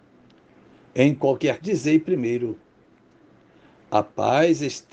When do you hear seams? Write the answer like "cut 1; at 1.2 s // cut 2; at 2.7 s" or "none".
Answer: cut 1; at 1.6 s